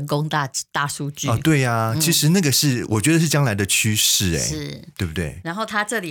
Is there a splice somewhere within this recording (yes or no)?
no